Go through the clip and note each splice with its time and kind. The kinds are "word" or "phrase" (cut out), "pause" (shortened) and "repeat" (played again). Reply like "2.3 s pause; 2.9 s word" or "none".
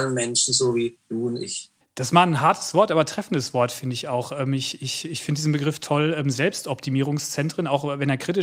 1.8 s pause